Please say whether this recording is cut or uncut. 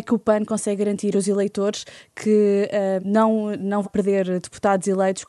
cut